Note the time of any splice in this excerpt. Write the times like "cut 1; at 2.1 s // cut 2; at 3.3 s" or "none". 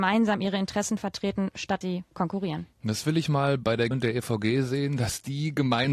cut 1; at 1.8 s // cut 2; at 3.9 s